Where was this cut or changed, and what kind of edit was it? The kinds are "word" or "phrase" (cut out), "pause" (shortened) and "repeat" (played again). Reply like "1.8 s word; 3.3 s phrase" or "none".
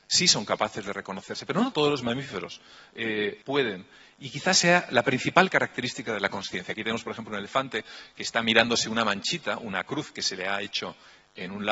1.7 s word; 3.4 s word